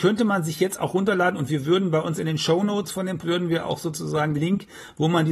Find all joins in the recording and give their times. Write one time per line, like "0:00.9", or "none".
0:03.2
0:04.3